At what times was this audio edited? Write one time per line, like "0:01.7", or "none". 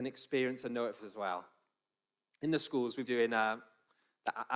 0:01.0
0:03.0

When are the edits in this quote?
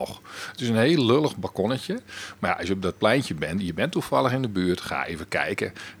none

